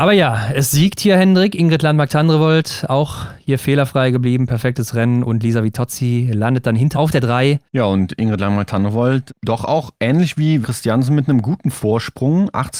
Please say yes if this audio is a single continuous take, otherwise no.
no